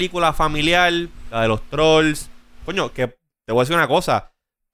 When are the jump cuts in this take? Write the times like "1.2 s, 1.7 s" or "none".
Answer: none